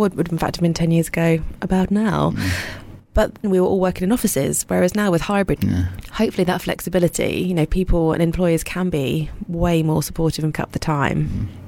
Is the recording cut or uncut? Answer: cut